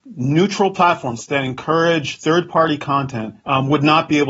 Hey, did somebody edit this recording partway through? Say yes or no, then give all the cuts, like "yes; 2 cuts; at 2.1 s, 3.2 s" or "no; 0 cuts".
yes; 1 cut; at 3.4 s